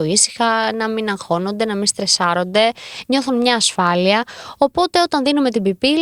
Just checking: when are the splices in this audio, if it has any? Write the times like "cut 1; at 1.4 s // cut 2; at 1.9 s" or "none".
none